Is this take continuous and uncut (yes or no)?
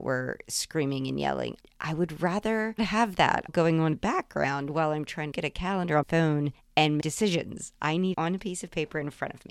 no